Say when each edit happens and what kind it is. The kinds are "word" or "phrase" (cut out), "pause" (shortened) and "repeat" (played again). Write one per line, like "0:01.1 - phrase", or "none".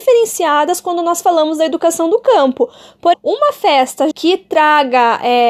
0:03.1 - word
0:04.1 - word